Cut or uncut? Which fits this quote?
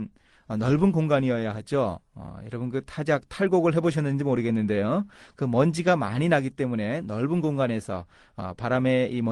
uncut